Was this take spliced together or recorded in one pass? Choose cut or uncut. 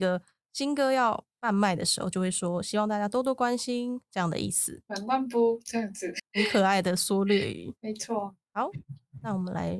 cut